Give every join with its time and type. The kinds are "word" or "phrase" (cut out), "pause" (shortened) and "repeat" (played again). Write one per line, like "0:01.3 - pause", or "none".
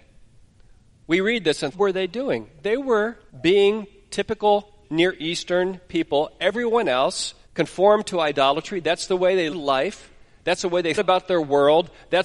0:01.7 - phrase
0:03.3 - pause
0:04.8 - word
0:07.4 - pause
0:09.5 - word
0:11.0 - word

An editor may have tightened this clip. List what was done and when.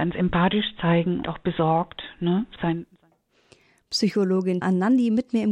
0:01.2 - phrase
0:02.6 - word
0:04.6 - word

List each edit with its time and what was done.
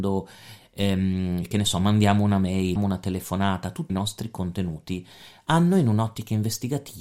0:02.8 - word
0:03.9 - phrase

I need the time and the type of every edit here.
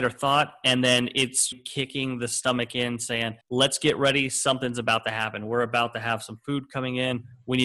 0:01.5 - word
0:03.4 - pause

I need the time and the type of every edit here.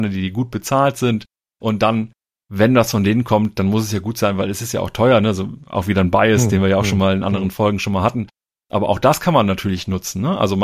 none

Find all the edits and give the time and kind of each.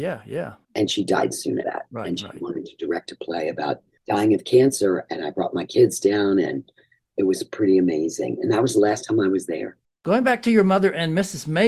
0:01.6 - word

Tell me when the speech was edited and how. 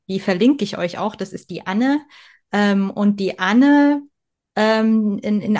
none

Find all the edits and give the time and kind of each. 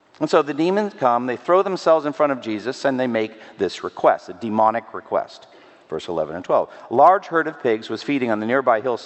none

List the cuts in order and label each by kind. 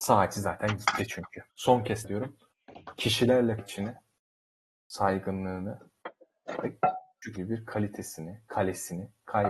0:01.5 - pause
0:02.0 - word
0:03.6 - phrase
0:07.4 - word

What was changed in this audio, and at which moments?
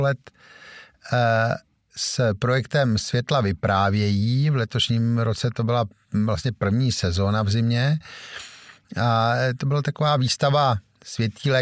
none

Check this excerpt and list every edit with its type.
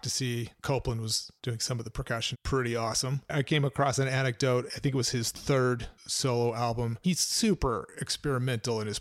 0:01.4 - pause
0:02.3 - phrase

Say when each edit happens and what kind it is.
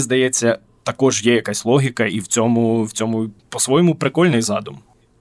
none

